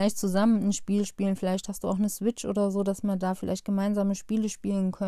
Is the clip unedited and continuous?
yes; 0 cuts

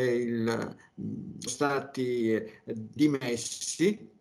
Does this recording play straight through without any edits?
no; 2 cuts; at 1.5 s, 3.0 s

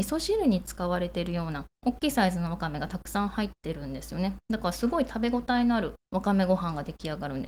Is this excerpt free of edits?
no; 2 cuts; at 1.8 s, 6.0 s

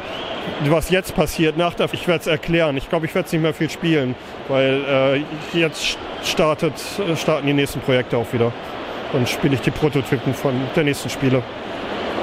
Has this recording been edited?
yes; 1 cut; at 1.9 s

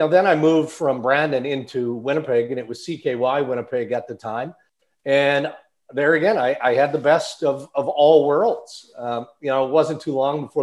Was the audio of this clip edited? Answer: no; 0 cuts

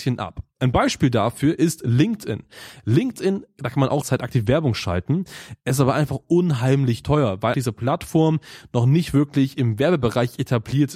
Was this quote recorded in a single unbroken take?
no; 2 cuts; at 4.0 s, 7.5 s

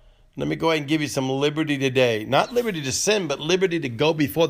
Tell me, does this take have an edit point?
no; 0 cuts

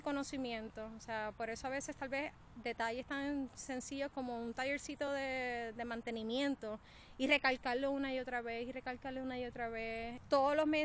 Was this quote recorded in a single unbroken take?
yes; 0 cuts

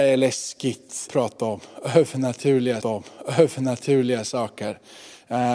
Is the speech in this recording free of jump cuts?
no; 2 cuts; at 1.1 s, 2.8 s

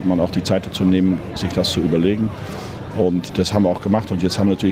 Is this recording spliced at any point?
no; 0 cuts

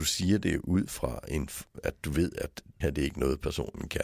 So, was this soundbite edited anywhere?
yes; 1 cut; at 2.8 s

